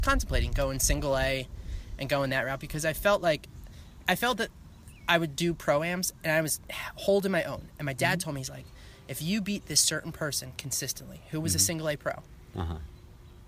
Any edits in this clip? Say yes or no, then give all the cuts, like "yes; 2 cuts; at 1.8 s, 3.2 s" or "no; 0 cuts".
no; 0 cuts